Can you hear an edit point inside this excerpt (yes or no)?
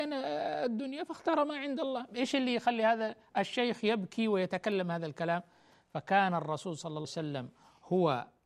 yes